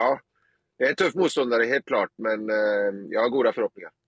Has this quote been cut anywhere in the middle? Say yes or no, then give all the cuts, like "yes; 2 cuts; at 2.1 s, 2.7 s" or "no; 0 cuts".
no; 0 cuts